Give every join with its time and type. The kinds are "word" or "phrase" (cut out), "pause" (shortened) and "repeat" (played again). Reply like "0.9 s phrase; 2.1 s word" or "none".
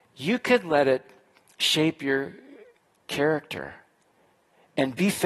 none